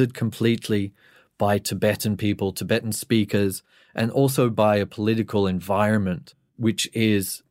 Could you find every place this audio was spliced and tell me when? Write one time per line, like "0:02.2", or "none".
none